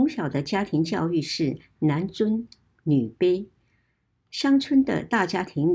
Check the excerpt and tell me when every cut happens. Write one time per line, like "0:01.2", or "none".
none